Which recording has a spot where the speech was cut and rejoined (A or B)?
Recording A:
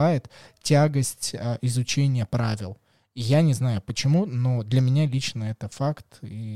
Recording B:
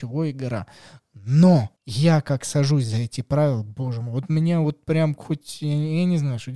B